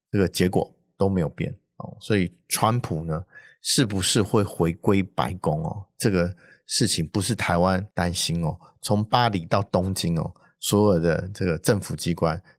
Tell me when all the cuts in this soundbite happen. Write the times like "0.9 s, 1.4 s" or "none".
7.9 s